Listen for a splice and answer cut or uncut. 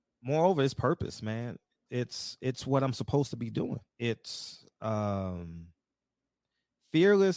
cut